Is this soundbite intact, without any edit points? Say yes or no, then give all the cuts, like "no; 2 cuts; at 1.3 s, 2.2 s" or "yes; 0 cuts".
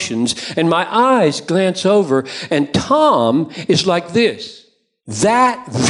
yes; 0 cuts